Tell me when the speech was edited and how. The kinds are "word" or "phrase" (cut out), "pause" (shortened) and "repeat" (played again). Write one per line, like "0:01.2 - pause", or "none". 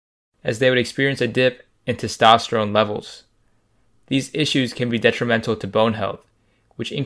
none